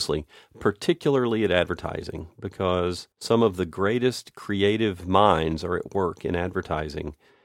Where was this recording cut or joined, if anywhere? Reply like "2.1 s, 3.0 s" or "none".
3.1 s